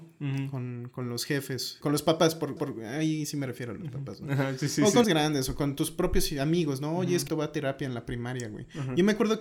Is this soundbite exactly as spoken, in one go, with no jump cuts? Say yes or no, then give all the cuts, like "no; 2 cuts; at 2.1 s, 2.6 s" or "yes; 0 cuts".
no; 4 cuts; at 1.8 s, 2.6 s, 5.0 s, 7.3 s